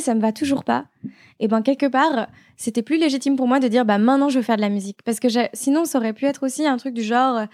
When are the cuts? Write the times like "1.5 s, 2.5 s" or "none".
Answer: none